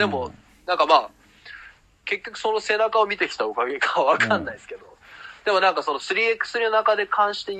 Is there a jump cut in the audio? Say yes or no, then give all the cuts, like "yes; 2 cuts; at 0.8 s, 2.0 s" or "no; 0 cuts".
no; 0 cuts